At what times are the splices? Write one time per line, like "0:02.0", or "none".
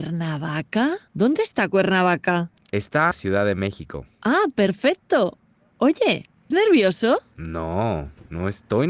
0:01.1
0:03.1
0:06.5